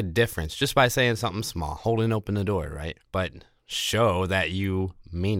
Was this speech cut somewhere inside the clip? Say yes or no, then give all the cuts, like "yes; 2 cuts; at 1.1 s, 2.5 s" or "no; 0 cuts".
yes; 1 cut; at 3.1 s